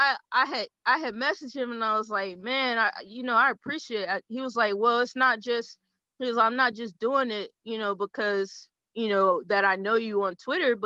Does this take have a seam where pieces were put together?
no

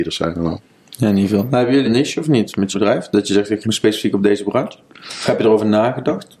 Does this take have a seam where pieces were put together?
yes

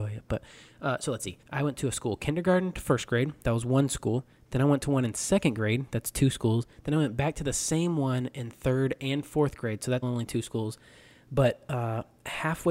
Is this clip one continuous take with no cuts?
no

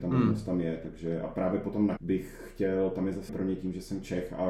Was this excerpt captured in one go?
no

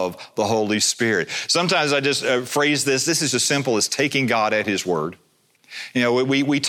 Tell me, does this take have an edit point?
yes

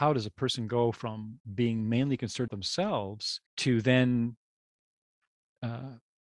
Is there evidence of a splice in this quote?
yes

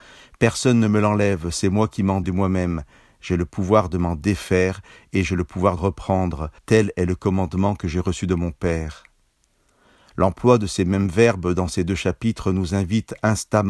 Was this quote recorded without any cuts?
no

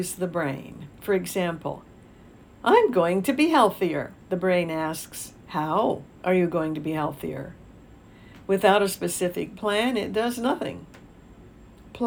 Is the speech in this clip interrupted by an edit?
yes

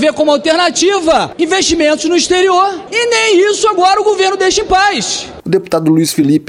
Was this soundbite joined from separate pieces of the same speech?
no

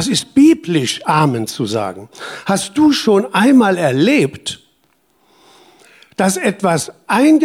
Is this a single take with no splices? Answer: yes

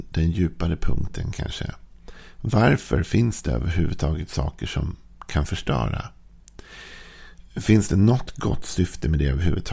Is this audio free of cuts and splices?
yes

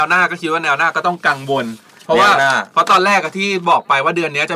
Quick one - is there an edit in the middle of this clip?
no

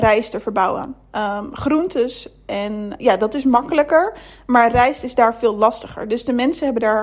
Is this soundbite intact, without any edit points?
no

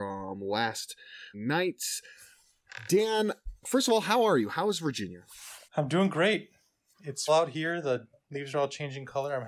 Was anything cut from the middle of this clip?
yes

